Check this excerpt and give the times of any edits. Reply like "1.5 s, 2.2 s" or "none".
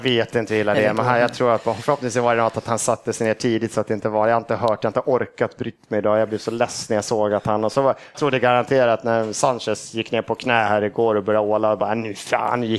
8.1 s